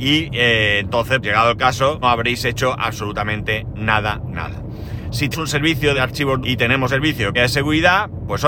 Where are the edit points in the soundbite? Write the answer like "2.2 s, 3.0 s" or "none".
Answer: 1.2 s, 2.0 s, 4.3 s, 5.3 s, 5.9 s, 6.4 s, 6.9 s, 7.3 s